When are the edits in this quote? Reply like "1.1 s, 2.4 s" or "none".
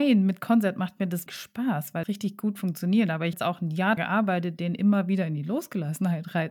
1.3 s, 2.0 s, 3.3 s, 4.0 s

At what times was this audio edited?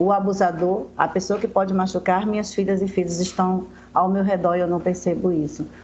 none

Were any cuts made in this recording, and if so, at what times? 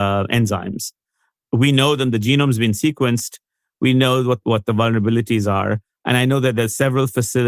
4.4 s

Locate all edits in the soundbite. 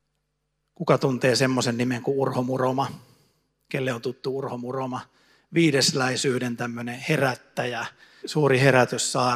8.2 s

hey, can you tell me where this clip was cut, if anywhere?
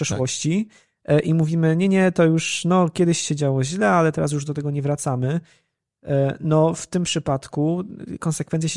none

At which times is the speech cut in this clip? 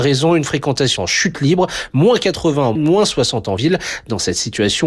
1.0 s, 2.8 s

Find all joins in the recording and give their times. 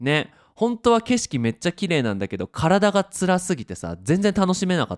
none

